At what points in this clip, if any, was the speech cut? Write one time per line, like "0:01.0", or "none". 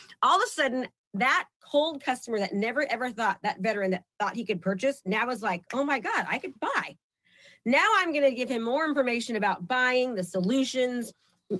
0:06.6